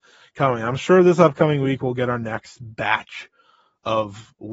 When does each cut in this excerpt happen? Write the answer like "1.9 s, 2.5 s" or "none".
none